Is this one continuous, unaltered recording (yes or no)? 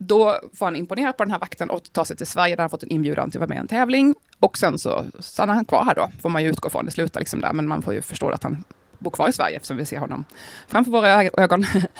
yes